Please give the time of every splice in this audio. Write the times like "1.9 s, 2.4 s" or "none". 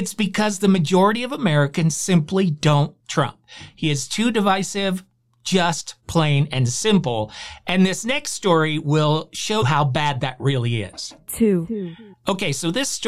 3.0 s, 9.6 s